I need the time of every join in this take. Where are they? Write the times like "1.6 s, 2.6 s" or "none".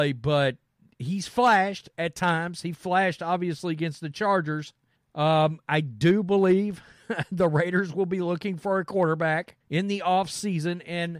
5.0 s, 9.6 s